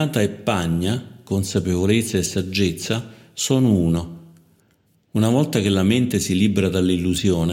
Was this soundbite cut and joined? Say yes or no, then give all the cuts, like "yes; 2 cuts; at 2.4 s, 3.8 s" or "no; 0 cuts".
no; 0 cuts